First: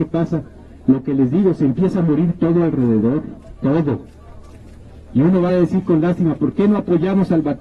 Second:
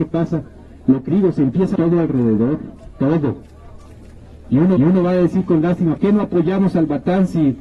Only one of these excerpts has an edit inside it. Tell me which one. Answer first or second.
second